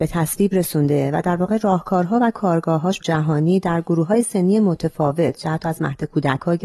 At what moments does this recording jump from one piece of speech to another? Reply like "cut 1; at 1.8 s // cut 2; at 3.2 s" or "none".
cut 1; at 3.0 s